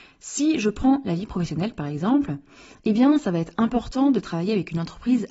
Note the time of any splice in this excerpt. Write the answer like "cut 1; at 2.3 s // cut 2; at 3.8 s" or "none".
none